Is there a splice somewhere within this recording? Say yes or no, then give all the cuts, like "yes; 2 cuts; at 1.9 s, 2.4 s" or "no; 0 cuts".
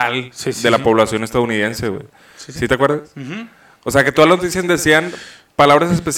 no; 0 cuts